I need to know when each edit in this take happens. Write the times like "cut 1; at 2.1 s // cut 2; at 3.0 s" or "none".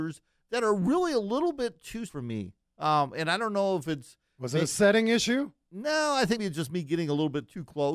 cut 1; at 2.1 s // cut 2; at 6.4 s